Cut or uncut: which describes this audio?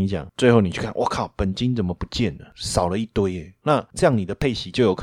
uncut